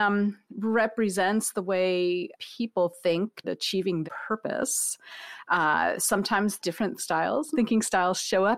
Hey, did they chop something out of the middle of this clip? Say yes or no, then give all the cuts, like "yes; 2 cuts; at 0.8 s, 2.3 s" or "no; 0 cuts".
yes; 6 cuts; at 2.3 s, 3.4 s, 4.0 s, 6.6 s, 7.0 s, 7.5 s